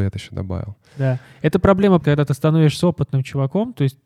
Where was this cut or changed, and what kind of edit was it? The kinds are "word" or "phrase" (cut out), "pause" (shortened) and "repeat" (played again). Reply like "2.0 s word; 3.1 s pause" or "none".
2.0 s word

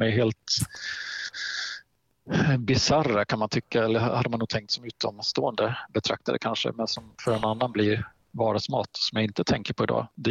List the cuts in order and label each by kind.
none

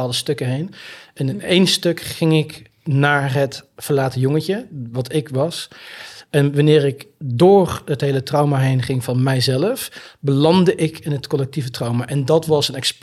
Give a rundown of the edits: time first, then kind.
2.8 s pause

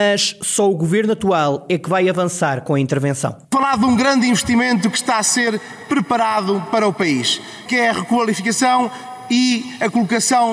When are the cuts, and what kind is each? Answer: 3.4 s pause

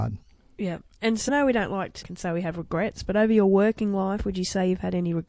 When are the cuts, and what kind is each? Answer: 1.3 s word; 2.0 s phrase

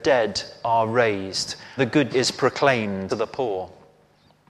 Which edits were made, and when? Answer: 1.8 s word; 2.1 s word; 3.1 s word

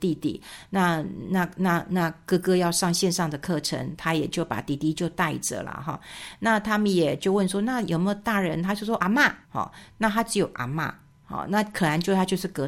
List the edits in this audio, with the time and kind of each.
9.0 s word; 9.4 s pause

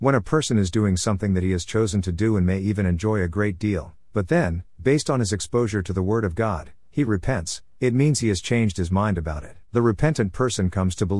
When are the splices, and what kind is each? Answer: 9.7 s pause

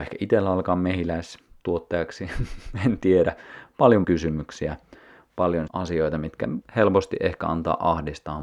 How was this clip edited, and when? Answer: 4.0 s word; 5.7 s word; 6.6 s word

